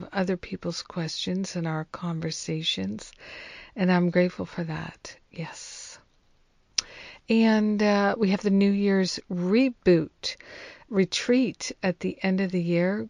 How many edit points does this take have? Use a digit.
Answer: 1